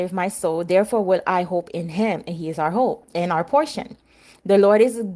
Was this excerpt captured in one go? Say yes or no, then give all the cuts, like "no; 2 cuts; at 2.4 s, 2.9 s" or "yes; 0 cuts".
yes; 0 cuts